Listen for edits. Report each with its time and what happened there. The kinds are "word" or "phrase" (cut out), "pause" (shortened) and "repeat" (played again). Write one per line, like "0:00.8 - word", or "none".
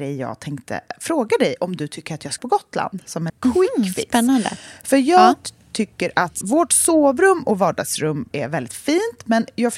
0:02.4 - word
0:03.3 - word
0:06.4 - word
0:08.3 - word